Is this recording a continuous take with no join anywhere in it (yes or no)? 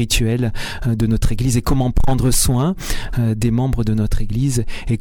yes